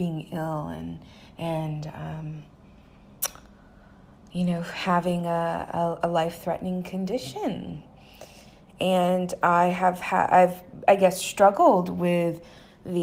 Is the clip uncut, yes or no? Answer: yes